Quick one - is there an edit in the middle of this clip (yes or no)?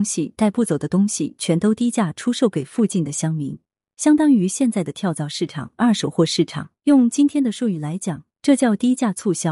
yes